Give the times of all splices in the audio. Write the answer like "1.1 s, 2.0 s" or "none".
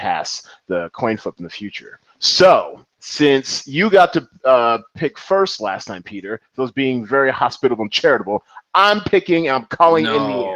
2.9 s